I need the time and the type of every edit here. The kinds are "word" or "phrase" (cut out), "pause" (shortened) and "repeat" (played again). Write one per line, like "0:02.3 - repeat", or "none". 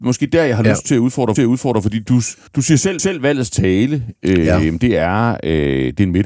0:01.4 - repeat
0:02.5 - pause
0:03.0 - repeat